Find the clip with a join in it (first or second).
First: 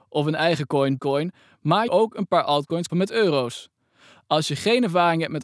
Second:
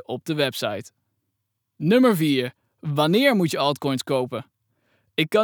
first